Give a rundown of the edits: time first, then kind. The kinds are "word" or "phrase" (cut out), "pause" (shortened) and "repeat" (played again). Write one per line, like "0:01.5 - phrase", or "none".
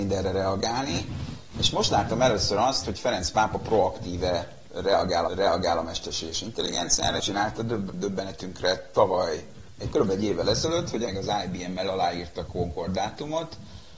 0:05.3 - repeat
0:07.2 - word
0:07.9 - word
0:11.1 - word
0:12.5 - word